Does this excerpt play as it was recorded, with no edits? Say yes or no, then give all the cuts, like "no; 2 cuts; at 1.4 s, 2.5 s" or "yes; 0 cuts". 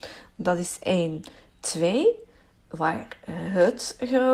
yes; 0 cuts